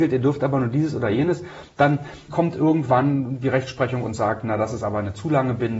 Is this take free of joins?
no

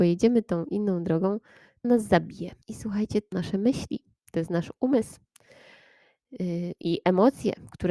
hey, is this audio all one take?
no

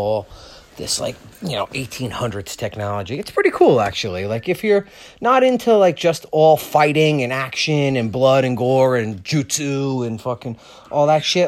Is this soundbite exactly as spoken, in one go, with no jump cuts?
yes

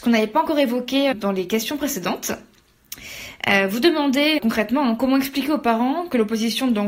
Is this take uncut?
no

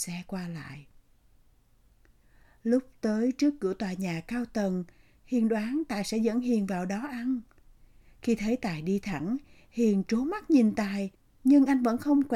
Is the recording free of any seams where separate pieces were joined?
yes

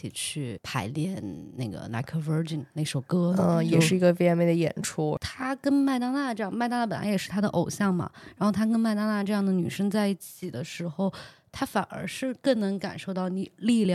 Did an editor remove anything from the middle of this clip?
no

